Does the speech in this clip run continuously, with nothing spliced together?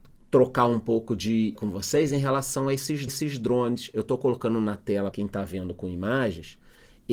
no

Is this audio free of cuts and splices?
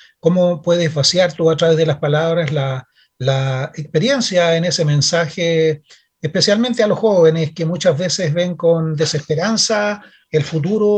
yes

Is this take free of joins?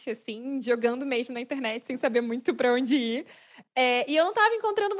yes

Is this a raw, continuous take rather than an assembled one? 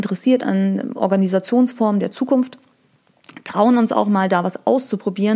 yes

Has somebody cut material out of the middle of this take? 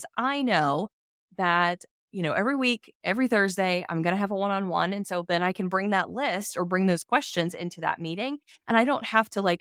no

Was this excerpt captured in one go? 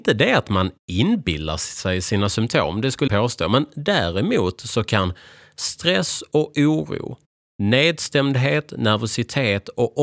no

